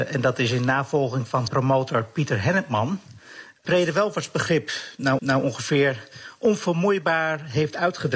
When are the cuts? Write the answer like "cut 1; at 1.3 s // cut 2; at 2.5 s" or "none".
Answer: cut 1; at 1.5 s // cut 2; at 3.6 s // cut 3; at 5.2 s